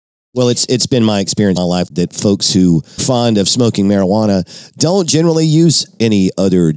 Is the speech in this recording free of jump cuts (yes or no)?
no